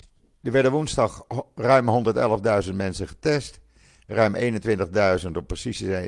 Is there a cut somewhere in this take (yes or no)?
no